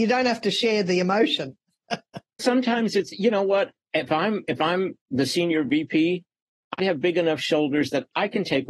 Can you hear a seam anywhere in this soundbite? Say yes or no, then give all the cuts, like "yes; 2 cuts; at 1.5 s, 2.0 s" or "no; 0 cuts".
yes; 2 cuts; at 2.4 s, 6.8 s